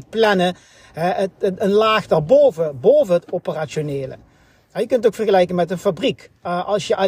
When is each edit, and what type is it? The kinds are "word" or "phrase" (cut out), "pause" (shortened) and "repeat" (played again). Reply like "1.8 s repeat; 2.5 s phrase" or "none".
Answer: none